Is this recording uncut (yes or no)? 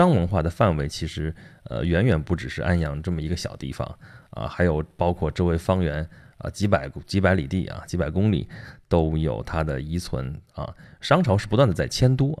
yes